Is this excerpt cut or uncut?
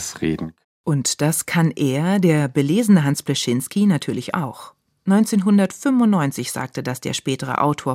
uncut